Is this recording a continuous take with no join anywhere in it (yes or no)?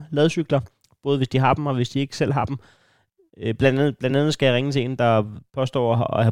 yes